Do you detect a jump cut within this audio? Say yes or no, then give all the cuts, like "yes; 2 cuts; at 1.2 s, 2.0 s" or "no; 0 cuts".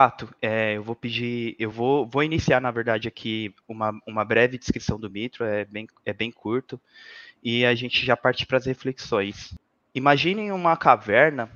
no; 0 cuts